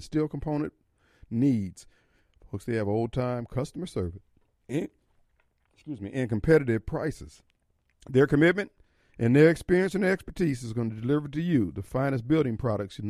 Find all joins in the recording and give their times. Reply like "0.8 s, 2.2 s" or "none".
none

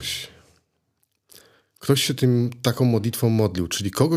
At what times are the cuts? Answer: none

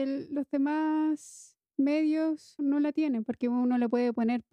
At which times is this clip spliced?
2.6 s

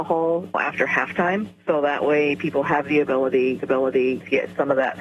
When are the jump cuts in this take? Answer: 3.6 s

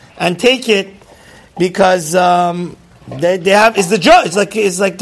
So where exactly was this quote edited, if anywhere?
none

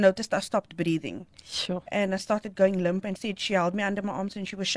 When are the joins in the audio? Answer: 3.2 s

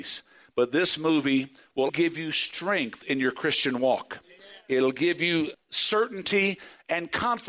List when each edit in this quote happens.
1.9 s, 5.5 s

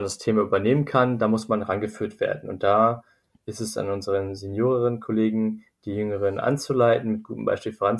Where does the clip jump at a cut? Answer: none

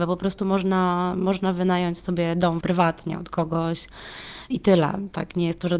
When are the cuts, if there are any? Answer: 2.6 s, 4.5 s

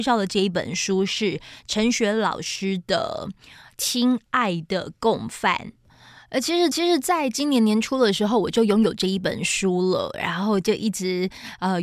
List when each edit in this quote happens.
6.7 s

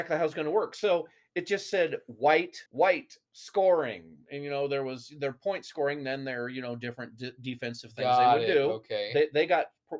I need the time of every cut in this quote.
2.7 s

